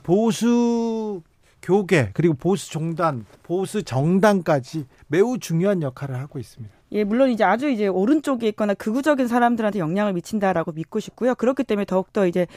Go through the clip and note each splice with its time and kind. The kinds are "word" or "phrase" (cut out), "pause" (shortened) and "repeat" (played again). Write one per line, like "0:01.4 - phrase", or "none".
0:01.4 - pause
0:03.4 - pause
0:06.8 - pause